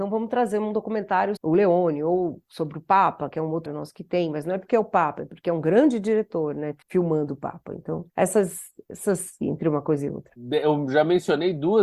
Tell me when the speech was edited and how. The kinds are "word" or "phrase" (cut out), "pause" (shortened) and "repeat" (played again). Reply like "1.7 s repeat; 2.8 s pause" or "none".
1.4 s word; 3.7 s word; 6.8 s pause; 8.1 s pause; 9.4 s phrase